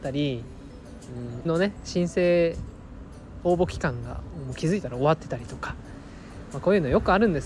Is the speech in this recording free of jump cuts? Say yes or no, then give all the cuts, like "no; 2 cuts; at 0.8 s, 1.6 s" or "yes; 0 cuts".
no; 1 cut; at 1.4 s